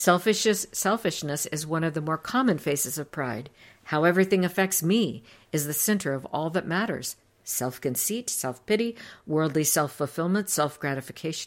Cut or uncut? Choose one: uncut